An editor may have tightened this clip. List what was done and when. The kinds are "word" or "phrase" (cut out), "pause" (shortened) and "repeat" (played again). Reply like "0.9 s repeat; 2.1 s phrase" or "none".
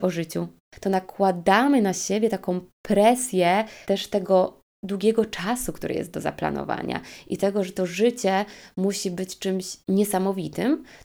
3.8 s pause; 9.8 s pause